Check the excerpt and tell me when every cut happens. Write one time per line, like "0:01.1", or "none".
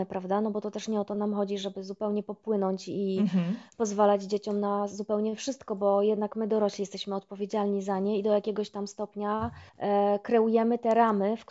0:09.7